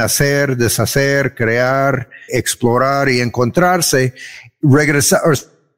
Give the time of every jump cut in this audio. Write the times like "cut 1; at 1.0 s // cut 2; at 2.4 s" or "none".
cut 1; at 2.3 s